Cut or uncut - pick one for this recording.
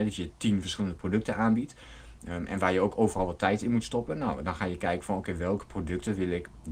uncut